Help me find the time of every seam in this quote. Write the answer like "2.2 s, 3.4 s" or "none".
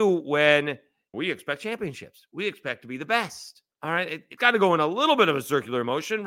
1.1 s, 3.7 s, 4.4 s